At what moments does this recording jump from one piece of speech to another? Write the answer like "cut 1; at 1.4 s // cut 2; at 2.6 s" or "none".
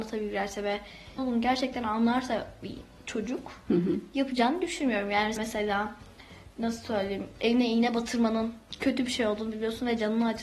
cut 1; at 1.2 s // cut 2; at 5.4 s